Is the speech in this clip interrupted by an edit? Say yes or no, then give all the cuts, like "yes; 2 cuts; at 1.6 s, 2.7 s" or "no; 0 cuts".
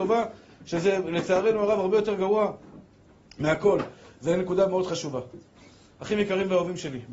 no; 0 cuts